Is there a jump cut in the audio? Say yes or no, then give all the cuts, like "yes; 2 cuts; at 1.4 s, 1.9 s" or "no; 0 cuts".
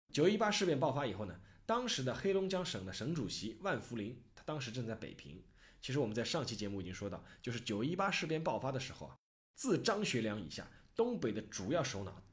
no; 0 cuts